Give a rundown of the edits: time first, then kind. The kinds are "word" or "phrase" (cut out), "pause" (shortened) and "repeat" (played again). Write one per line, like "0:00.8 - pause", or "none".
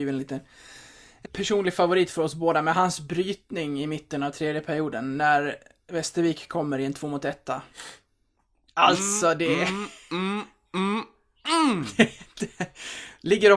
0:01.3 - word